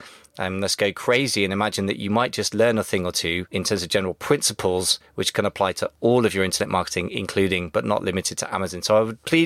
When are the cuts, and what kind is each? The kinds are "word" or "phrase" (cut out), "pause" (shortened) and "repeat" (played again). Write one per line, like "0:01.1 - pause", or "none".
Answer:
none